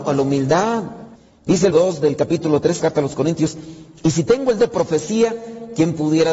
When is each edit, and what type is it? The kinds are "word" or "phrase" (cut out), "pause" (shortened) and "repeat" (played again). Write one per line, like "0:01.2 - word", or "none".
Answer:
0:01.2 - pause
0:01.7 - word
0:02.8 - phrase
0:04.6 - word